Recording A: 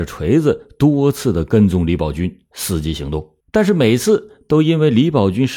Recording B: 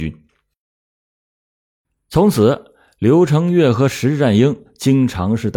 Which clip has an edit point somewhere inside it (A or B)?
A